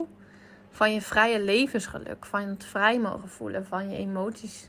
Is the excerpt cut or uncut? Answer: uncut